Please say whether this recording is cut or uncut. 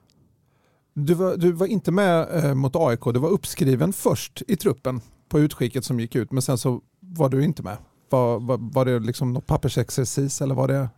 uncut